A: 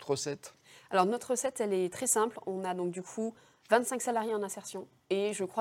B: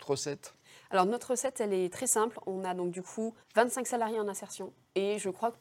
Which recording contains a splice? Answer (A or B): B